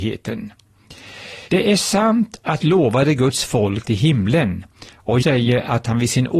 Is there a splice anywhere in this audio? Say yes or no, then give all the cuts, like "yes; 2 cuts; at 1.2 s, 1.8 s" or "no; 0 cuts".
yes; 4 cuts; at 1.5 s, 2.6 s, 3.8 s, 5.2 s